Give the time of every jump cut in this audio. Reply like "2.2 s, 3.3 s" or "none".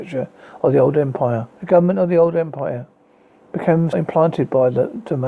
1.6 s, 3.9 s